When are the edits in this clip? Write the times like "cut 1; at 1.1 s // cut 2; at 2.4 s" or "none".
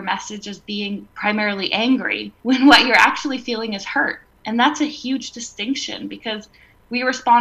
cut 1; at 2.4 s